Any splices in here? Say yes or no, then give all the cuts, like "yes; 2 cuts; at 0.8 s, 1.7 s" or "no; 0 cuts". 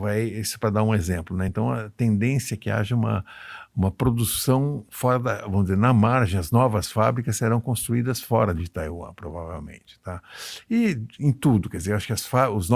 no; 0 cuts